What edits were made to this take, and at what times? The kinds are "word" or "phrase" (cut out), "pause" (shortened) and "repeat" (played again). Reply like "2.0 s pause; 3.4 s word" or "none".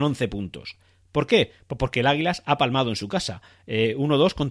none